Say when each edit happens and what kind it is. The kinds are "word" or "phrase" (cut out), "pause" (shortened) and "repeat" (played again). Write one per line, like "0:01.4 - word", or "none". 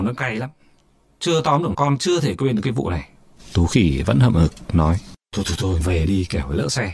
0:01.7 - word
0:03.4 - pause
0:05.2 - pause
0:05.8 - word